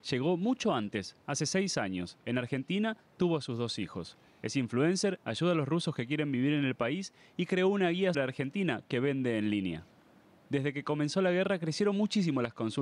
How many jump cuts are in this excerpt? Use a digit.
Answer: 1